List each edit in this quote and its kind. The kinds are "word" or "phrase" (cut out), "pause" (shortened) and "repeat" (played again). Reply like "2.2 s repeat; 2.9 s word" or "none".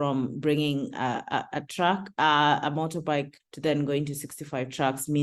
3.4 s word